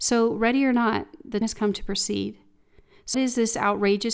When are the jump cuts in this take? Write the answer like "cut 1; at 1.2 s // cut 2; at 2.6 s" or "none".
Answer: cut 1; at 1.4 s // cut 2; at 3.1 s